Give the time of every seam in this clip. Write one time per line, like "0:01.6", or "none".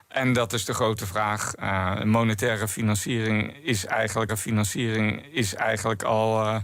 0:04.3